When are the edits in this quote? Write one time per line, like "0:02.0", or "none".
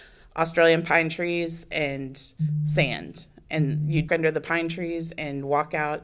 0:04.1